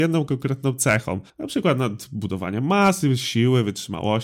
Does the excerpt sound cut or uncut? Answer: cut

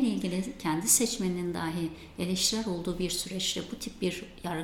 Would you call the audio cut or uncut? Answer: uncut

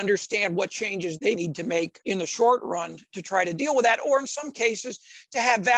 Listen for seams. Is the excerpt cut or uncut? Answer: cut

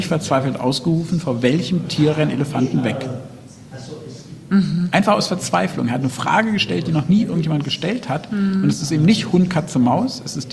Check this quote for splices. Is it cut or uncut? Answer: uncut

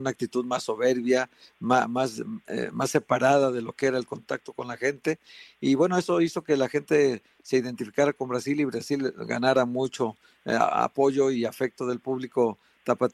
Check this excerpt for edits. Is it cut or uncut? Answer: uncut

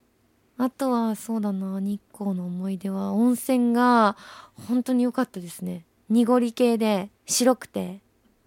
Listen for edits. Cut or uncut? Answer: cut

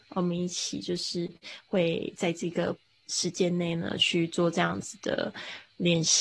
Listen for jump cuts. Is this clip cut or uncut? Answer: uncut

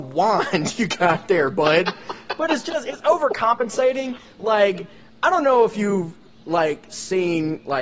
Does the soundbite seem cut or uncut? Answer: uncut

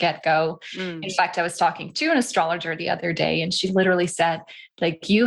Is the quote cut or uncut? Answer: uncut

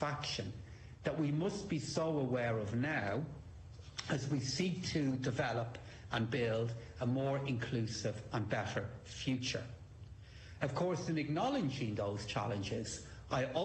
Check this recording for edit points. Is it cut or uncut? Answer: uncut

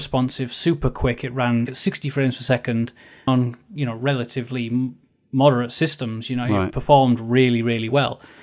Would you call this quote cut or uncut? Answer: cut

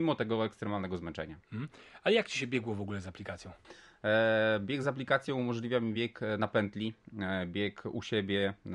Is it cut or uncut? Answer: uncut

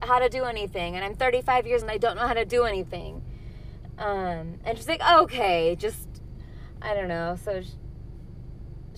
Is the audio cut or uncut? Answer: cut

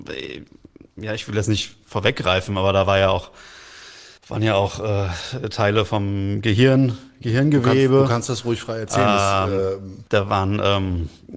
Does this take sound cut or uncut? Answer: cut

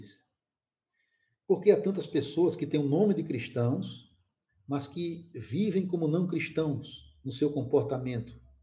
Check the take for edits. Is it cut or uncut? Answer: uncut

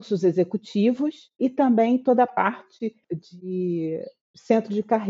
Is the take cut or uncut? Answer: cut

